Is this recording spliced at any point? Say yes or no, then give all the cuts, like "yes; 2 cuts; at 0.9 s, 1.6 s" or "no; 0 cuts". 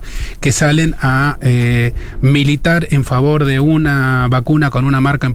no; 0 cuts